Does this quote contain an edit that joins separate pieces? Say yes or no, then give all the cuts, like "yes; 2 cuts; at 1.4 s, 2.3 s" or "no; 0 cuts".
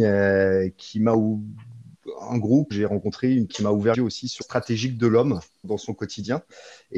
yes; 5 cuts; at 2.7 s, 3.5 s, 3.9 s, 4.4 s, 5.6 s